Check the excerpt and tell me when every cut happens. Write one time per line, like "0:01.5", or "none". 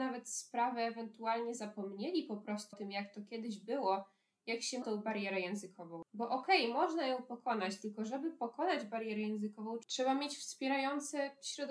0:02.7
0:04.8